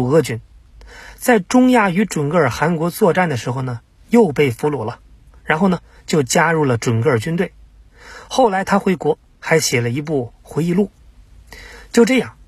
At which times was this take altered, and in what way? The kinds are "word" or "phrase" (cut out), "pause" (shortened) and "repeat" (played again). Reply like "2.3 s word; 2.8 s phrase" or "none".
none